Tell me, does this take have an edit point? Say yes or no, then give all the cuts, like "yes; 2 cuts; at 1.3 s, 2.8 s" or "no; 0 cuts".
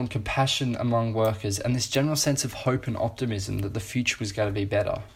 no; 0 cuts